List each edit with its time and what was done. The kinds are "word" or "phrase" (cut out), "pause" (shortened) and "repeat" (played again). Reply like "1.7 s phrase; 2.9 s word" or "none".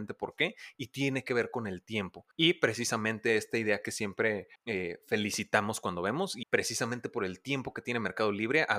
2.3 s pause; 4.6 s pause; 6.4 s phrase